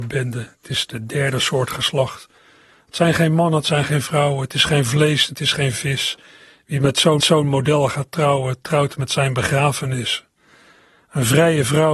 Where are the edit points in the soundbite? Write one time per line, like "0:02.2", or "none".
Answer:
0:07.2